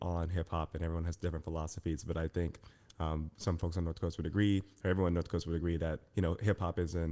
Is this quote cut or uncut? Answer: uncut